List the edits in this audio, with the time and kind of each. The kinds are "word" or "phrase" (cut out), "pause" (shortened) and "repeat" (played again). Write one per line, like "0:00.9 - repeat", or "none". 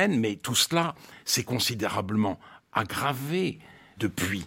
none